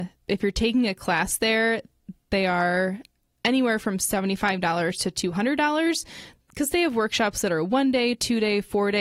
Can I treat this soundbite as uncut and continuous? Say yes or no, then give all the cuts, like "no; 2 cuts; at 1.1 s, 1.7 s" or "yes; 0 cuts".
yes; 0 cuts